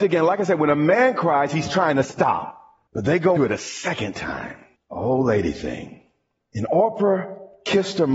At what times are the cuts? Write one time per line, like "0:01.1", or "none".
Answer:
0:02.9
0:03.4
0:04.7